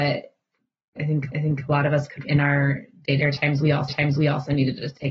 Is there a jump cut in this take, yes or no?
yes